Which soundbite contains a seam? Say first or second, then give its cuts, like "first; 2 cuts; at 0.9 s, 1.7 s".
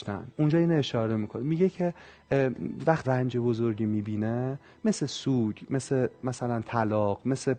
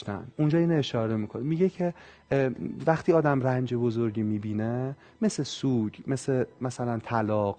first; 1 cut; at 3.0 s